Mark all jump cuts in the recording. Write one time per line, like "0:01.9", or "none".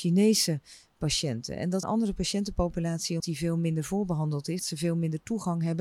0:01.8
0:03.2
0:04.6